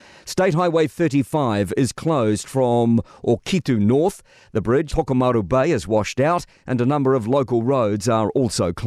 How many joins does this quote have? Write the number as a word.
one